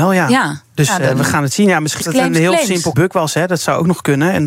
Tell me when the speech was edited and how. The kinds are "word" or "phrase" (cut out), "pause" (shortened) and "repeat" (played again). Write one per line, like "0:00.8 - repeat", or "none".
0:02.0 - word
0:02.9 - word